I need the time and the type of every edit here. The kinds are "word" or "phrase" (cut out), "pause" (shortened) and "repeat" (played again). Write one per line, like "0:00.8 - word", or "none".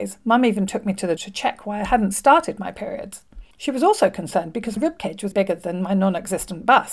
0:01.2 - word
0:03.5 - pause
0:04.8 - word
0:05.3 - word